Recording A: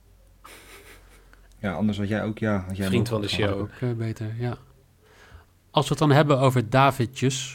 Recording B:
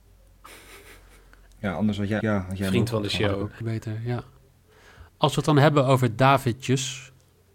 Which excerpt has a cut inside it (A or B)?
B